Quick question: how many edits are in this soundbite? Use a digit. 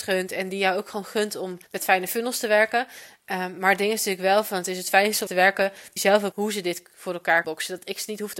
5